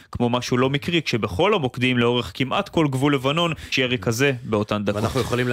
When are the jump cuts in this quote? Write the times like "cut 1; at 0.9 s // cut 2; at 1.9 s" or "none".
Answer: cut 1; at 3.7 s